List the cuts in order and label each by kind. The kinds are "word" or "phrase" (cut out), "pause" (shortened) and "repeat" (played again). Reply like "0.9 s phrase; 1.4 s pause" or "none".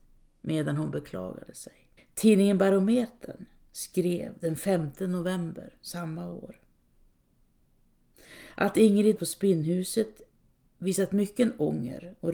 2.0 s pause; 9.2 s word